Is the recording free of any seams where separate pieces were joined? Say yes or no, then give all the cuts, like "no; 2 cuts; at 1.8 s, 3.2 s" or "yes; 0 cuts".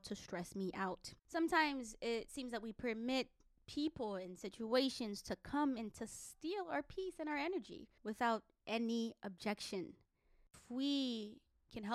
no; 2 cuts; at 1.2 s, 8.0 s